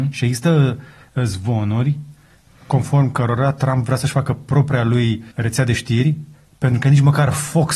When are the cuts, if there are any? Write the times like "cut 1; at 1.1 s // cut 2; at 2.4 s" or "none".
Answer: cut 1; at 5.3 s